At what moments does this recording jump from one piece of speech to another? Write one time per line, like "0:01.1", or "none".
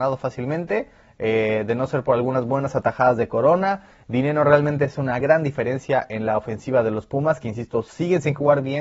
0:05.2